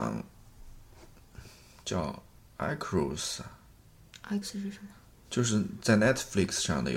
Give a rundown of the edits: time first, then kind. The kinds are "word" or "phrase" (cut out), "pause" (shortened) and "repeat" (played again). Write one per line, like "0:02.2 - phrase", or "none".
0:04.4 - word
0:05.1 - pause